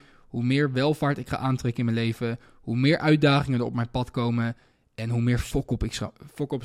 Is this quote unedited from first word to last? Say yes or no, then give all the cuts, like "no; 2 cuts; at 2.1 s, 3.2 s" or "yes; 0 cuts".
yes; 0 cuts